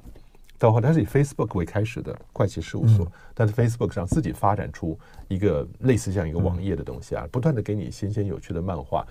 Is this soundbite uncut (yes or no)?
yes